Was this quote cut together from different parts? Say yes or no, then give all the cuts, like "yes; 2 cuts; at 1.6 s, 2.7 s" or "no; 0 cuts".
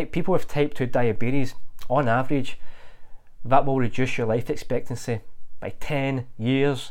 no; 0 cuts